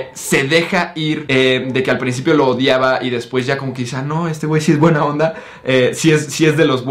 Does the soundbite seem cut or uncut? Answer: uncut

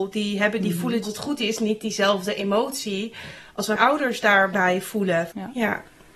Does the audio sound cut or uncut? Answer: cut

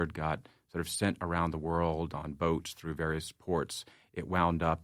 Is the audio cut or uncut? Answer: uncut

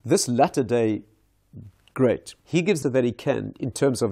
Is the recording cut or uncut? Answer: cut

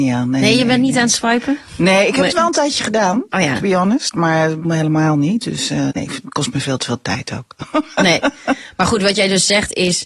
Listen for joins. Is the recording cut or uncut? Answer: cut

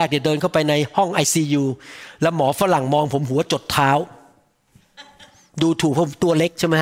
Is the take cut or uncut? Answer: uncut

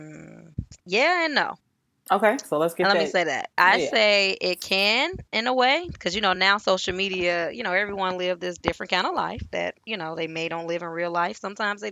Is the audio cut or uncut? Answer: uncut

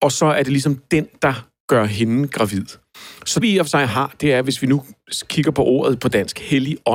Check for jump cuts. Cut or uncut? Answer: cut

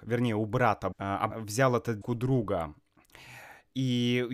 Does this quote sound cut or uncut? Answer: cut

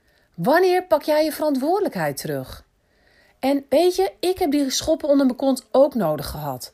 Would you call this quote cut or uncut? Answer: uncut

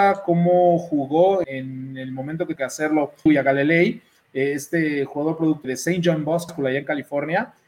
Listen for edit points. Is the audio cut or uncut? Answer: cut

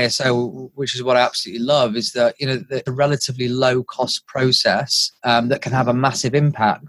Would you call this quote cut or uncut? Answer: cut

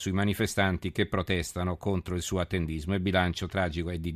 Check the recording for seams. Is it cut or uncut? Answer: uncut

